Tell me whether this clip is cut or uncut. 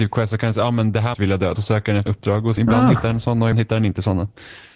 cut